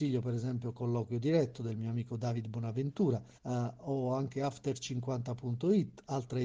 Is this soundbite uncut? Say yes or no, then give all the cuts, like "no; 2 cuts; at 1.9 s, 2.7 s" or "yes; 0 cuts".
no; 1 cut; at 3.4 s